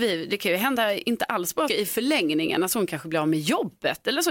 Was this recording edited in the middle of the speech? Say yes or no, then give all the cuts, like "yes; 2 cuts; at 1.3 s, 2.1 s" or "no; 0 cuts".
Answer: yes; 1 cut; at 1.7 s